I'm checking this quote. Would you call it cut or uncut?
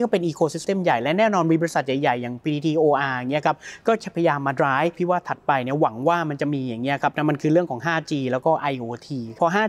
uncut